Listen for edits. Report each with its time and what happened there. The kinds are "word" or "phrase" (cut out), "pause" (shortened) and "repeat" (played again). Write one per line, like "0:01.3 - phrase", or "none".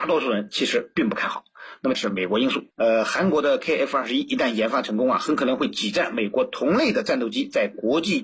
0:01.9 - phrase
0:02.7 - pause